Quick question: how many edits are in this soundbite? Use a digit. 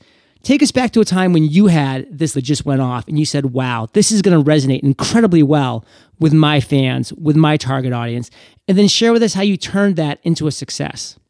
1